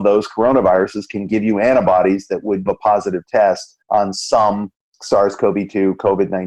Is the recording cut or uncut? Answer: cut